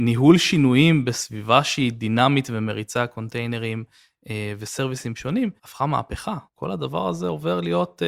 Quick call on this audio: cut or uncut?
cut